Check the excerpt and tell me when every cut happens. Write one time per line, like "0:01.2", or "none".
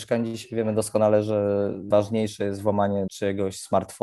0:01.9
0:03.1